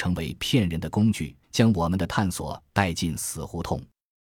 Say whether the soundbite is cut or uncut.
cut